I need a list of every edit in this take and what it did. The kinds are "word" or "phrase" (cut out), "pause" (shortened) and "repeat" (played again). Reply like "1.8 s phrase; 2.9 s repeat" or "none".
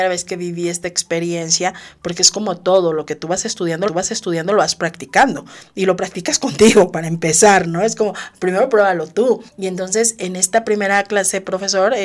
3.9 s repeat; 9.5 s pause